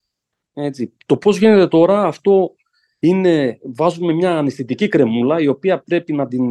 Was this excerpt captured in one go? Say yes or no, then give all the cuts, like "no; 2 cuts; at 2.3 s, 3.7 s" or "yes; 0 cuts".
yes; 0 cuts